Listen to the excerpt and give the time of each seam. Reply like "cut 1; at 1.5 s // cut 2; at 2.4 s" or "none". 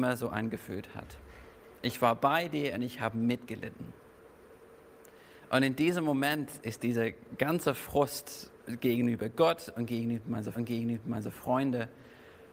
cut 1; at 10.5 s